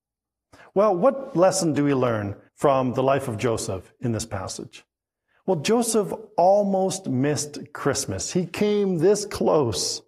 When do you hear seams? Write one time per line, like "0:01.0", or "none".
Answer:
0:02.5
0:05.0